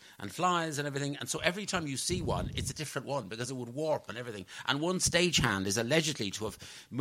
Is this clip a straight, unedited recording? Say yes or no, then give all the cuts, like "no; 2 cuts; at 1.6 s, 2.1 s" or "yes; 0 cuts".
yes; 0 cuts